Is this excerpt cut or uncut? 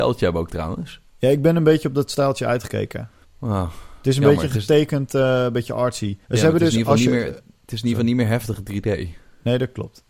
cut